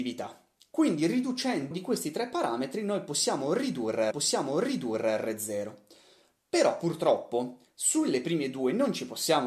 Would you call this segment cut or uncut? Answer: cut